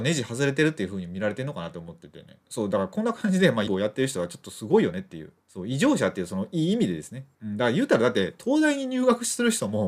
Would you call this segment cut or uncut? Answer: cut